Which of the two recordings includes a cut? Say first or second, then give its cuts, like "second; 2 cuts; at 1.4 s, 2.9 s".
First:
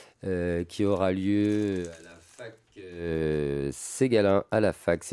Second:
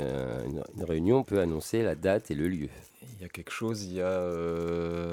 second; 2 cuts; at 1.2 s, 2.9 s